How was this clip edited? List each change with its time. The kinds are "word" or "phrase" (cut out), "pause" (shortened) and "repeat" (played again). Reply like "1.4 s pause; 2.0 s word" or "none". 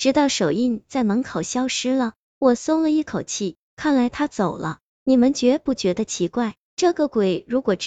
none